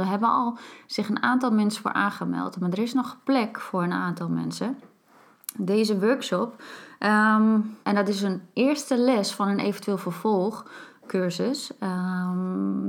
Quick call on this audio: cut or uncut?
cut